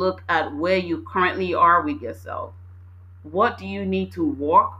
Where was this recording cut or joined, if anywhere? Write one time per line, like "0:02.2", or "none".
none

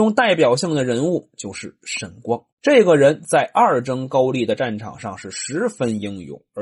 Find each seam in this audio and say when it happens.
0:02.5

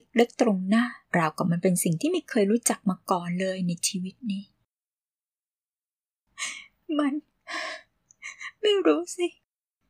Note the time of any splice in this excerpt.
0:01.0

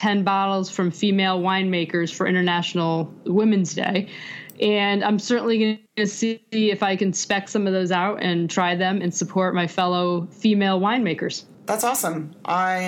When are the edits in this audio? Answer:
0:05.9
0:11.5

